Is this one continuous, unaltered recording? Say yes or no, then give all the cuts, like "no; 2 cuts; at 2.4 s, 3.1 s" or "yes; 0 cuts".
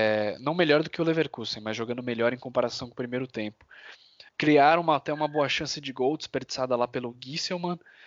no; 1 cut; at 4.3 s